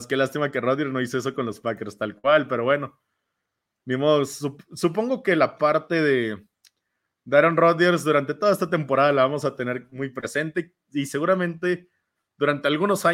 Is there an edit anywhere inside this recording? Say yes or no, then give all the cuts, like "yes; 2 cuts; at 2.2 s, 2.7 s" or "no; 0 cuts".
no; 0 cuts